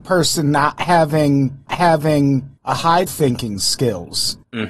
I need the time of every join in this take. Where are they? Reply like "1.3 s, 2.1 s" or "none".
1.7 s, 3.1 s